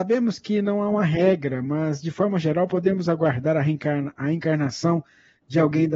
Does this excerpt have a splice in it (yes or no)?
no